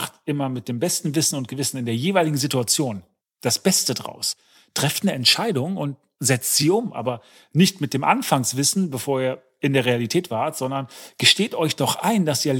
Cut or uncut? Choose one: uncut